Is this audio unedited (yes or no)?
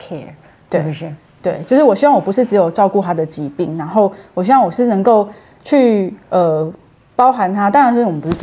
yes